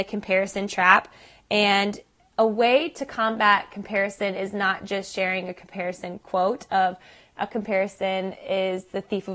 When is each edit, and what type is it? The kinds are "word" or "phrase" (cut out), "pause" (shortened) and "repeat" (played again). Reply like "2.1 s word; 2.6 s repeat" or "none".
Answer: none

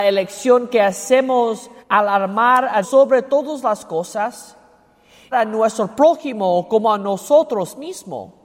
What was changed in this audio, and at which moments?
1.8 s pause; 2.8 s word; 5.3 s phrase

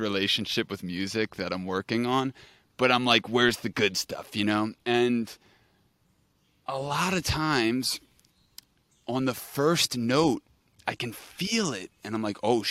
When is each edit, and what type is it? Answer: none

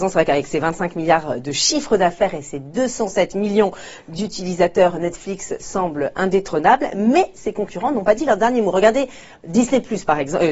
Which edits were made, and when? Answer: 8.0 s word

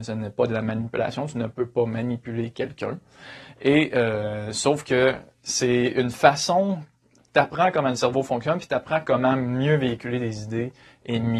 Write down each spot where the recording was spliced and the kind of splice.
none

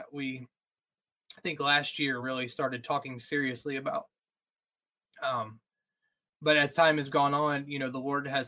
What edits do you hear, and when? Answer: none

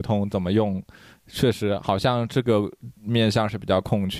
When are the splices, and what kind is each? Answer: 3.0 s pause

